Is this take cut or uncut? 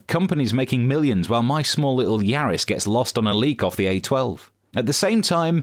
uncut